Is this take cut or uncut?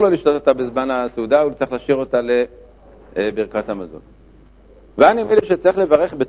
uncut